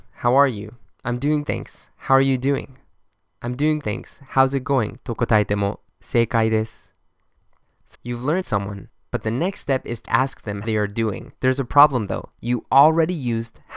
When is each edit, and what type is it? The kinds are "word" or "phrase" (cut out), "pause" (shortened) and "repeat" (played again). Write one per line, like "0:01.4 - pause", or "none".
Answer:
0:00.9 - pause
0:01.4 - word
0:03.8 - word
0:07.9 - word
0:08.4 - phrase
0:10.1 - word
0:10.6 - word
0:11.4 - pause
0:12.3 - pause